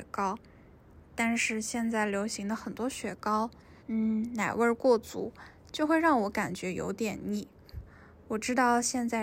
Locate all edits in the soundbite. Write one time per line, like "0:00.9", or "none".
0:03.8